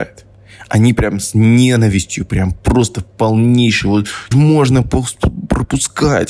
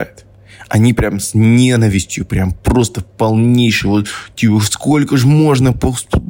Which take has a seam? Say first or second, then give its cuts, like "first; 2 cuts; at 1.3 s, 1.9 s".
first; 1 cut; at 4.3 s